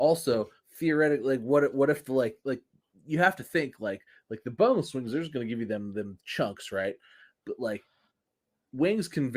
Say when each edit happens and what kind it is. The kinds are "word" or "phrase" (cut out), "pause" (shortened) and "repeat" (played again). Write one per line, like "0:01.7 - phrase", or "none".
none